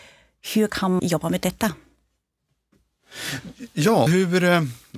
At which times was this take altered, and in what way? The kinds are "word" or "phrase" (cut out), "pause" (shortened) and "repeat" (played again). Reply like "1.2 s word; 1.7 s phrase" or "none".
1.0 s word; 4.1 s word